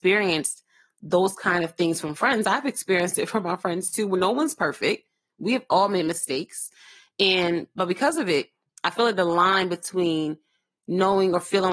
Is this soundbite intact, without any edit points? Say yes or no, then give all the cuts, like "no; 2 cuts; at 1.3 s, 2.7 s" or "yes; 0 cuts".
yes; 0 cuts